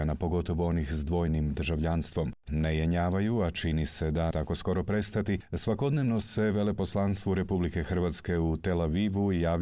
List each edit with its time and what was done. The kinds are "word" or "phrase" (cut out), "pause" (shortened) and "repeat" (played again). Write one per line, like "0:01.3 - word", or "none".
0:02.5 - phrase
0:04.3 - word